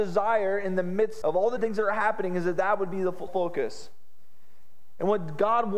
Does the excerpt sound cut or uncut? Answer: cut